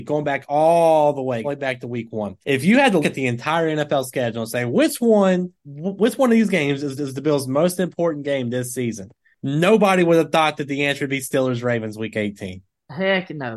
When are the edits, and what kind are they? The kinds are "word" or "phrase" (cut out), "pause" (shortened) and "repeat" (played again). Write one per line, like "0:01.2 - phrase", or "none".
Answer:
0:01.4 - phrase
0:02.4 - pause
0:03.0 - word
0:05.6 - pause
0:07.0 - repeat